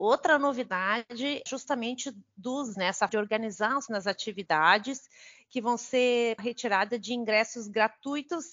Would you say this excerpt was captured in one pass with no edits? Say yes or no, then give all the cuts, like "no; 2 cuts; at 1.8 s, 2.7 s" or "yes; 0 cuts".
no; 5 cuts; at 1.5 s, 2.7 s, 3.1 s, 3.9 s, 6.4 s